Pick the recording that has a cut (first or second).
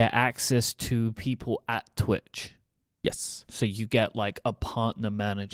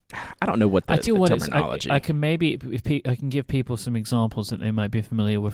second